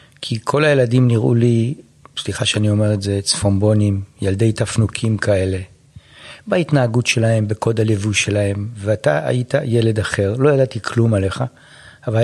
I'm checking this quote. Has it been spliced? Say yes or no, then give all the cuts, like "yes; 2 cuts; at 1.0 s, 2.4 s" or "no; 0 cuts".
no; 0 cuts